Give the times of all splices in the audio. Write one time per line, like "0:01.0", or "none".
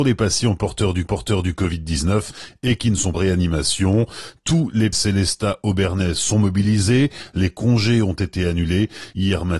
0:01.0
0:03.1
0:04.9